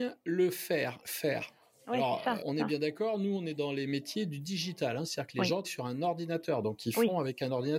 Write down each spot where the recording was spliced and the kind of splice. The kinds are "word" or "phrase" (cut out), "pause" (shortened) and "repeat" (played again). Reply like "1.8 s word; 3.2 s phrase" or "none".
1.0 s word; 2.4 s word; 5.6 s word